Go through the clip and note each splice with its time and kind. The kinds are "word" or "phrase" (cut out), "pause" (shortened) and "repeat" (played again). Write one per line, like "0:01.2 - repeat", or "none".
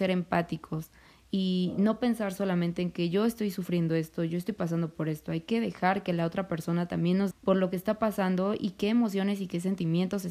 0:07.3 - word